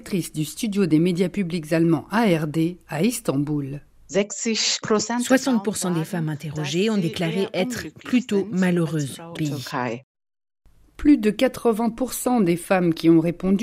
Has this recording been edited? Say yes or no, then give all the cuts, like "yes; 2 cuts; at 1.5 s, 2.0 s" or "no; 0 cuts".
yes; 1 cut; at 9.4 s